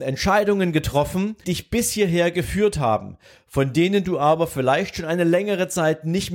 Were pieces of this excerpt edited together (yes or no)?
yes